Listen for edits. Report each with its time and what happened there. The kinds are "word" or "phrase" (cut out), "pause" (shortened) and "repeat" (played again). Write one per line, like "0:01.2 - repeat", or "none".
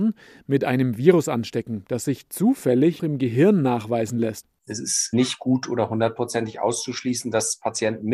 0:03.0 - word